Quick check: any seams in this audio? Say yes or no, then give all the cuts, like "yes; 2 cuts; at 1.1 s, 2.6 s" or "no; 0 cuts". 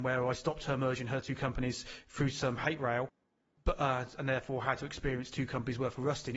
no; 0 cuts